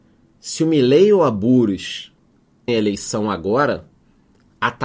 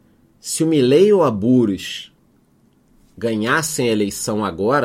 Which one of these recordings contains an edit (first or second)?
first